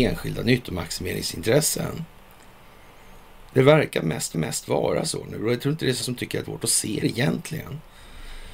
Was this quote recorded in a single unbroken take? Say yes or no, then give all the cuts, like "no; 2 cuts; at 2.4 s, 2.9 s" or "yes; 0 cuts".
no; 5 cuts; at 3.5 s, 4.3 s, 6.0 s, 6.4 s, 7.0 s